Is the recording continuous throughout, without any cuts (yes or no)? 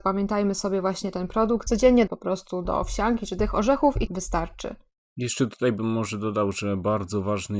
no